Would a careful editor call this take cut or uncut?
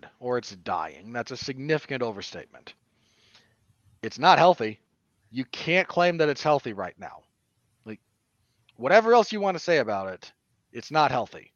uncut